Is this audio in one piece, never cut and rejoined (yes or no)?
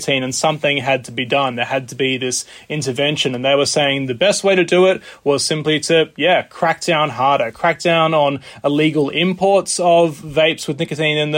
yes